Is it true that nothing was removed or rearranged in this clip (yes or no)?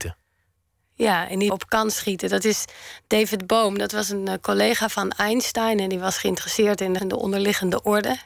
no